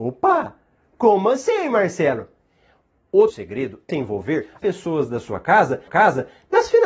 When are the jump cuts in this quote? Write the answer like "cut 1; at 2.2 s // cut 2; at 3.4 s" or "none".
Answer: cut 1; at 3.3 s // cut 2; at 3.9 s // cut 3; at 4.6 s // cut 4; at 5.9 s